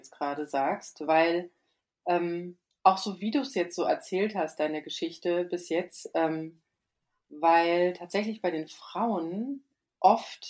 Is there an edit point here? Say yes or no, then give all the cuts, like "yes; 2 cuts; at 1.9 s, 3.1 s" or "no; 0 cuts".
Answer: no; 0 cuts